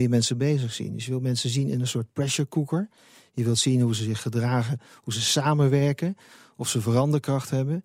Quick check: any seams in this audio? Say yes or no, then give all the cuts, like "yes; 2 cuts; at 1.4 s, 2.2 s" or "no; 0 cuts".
no; 0 cuts